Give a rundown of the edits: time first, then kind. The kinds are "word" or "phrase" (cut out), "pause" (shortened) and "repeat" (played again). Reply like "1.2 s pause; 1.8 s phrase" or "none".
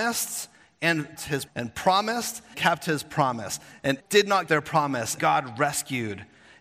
1.2 s word; 1.5 s word; 2.5 s word; 4.0 s word; 4.5 s word; 5.2 s word

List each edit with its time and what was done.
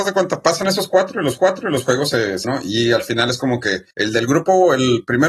1.4 s repeat; 2.4 s word; 3.9 s pause

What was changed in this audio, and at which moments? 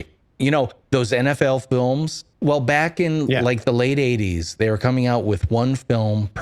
2.3 s pause

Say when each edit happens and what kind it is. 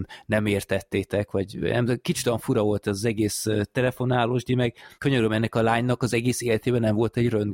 4.9 s pause

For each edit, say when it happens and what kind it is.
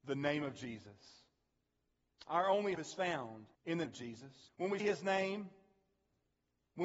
2.7 s word; 3.5 s pause; 3.8 s word; 4.5 s pause; 4.8 s word

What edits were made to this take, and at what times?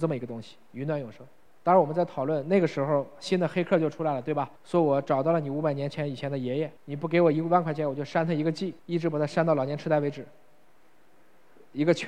1.5 s pause; 4.6 s pause; 6.8 s pause; 8.8 s pause

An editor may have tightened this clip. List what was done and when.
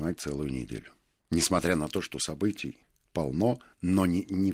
none

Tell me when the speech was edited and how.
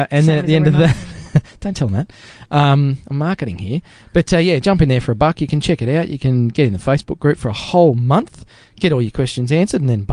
none

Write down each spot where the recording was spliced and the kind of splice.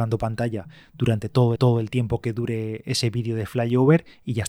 1.6 s repeat

